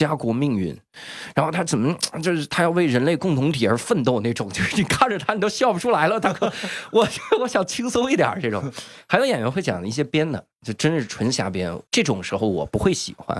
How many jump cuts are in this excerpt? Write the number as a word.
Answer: one